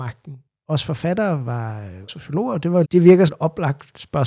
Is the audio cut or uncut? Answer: cut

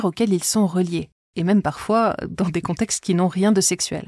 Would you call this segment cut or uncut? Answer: uncut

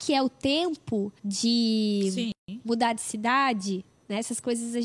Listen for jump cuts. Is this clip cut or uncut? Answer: cut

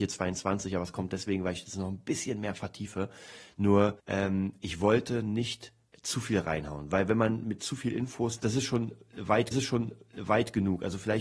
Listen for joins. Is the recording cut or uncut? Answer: cut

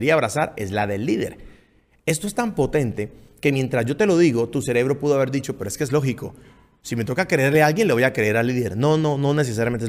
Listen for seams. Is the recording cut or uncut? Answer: uncut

